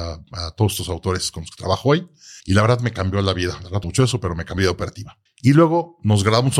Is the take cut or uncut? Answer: cut